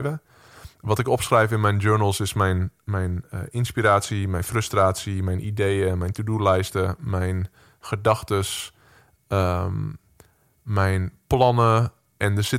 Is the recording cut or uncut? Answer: uncut